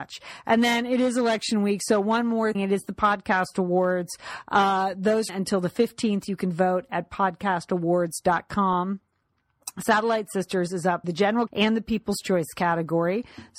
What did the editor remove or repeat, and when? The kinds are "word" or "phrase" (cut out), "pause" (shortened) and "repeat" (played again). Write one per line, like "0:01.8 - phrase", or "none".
0:02.5 - word
0:05.3 - word
0:11.0 - word
0:11.5 - word

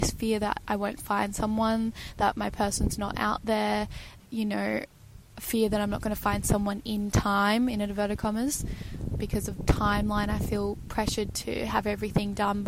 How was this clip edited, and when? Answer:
0:04.2 - word
0:09.1 - word
0:09.6 - word

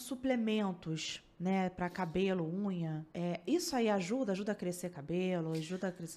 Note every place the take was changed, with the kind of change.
0:03.1 - pause

